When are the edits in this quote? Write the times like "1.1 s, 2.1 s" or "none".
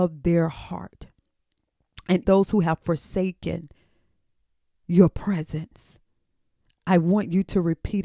2.2 s